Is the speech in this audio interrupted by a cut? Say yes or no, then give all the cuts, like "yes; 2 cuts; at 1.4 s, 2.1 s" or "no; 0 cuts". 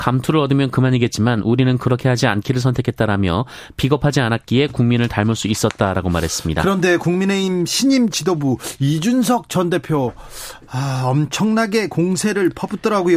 no; 0 cuts